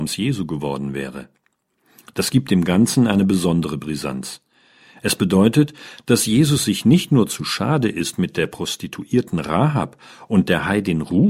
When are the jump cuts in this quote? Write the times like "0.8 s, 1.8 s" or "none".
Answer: none

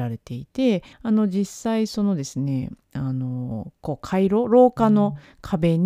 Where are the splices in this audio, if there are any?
0.9 s

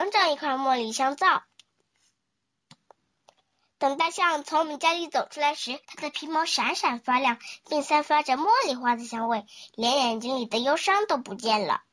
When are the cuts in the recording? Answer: 5.8 s

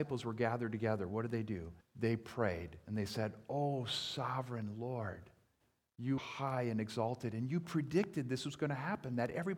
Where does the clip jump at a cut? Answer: 1.8 s, 6.2 s

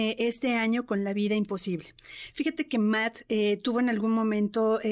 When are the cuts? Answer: none

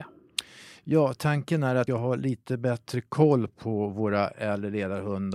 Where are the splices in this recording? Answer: 1.9 s

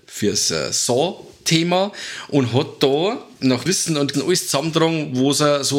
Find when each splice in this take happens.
3.7 s, 4.1 s

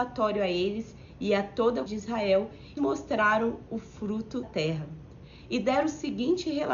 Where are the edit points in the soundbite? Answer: 1.9 s, 2.8 s, 4.4 s

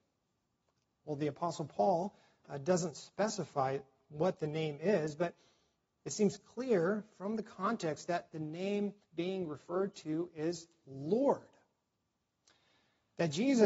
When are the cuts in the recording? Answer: 9.0 s

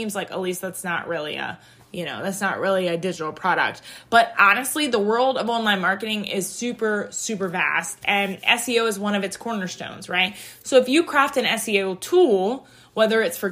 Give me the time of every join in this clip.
none

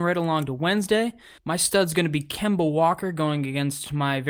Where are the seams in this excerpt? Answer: 1.4 s

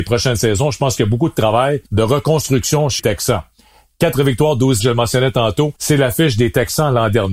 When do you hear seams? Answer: 1.9 s, 3.0 s, 4.8 s, 5.8 s

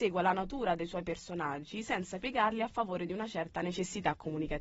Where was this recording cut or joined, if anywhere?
none

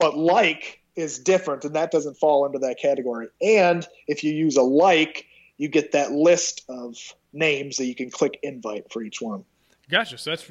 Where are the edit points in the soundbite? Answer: none

